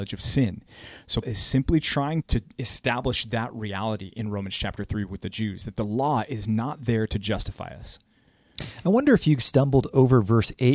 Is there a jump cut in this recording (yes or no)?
yes